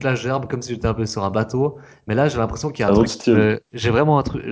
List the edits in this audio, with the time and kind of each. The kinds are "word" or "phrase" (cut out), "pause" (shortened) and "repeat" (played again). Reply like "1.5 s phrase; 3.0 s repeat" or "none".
none